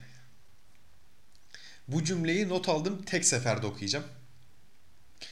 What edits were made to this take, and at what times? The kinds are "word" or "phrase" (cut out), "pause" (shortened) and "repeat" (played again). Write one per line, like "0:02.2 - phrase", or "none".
none

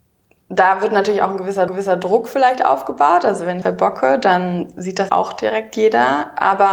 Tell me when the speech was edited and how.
0:01.7 - repeat
0:03.6 - phrase
0:05.1 - word

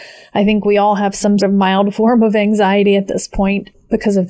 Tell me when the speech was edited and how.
0:01.4 - word

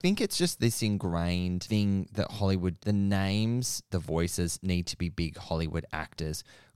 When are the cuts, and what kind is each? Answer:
0:02.8 - phrase
0:03.9 - word

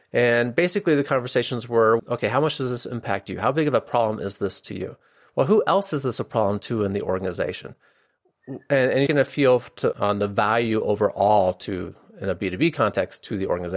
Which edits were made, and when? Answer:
0:02.0 - word
0:09.1 - word
0:09.9 - word

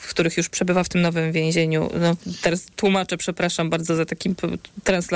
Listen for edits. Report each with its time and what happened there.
none

